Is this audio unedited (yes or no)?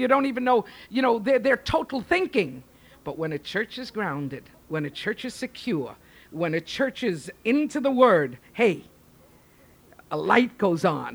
yes